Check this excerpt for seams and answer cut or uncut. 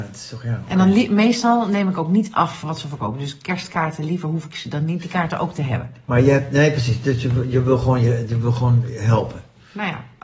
uncut